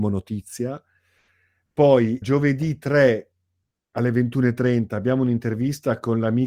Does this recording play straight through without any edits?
no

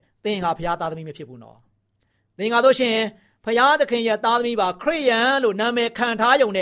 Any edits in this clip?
no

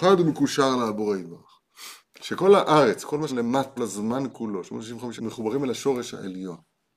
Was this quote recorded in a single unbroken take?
no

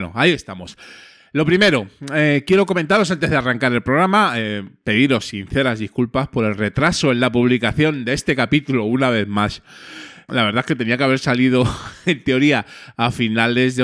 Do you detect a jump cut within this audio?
no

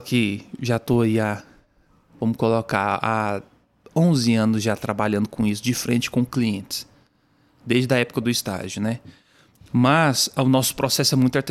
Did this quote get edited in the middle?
no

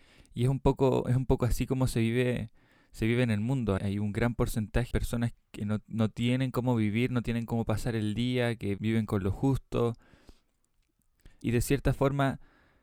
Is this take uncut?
no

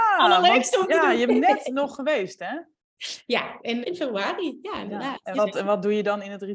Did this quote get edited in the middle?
yes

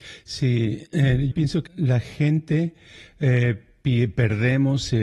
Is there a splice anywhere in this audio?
yes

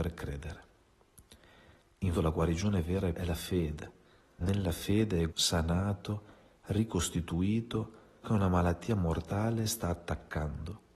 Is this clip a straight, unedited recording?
no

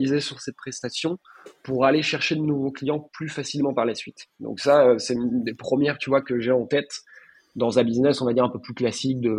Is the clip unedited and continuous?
yes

